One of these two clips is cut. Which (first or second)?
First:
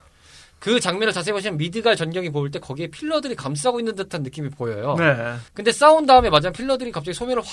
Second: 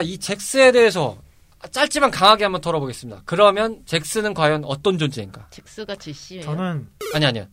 first